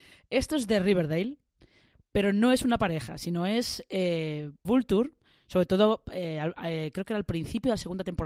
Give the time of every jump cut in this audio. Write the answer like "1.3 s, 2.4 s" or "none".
4.6 s